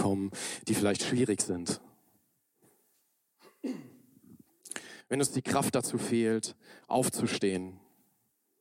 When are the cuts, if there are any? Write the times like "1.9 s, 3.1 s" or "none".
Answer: none